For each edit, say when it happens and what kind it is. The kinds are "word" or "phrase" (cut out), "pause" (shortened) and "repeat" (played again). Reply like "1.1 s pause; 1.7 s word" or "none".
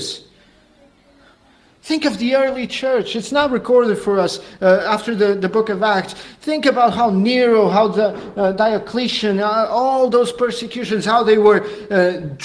none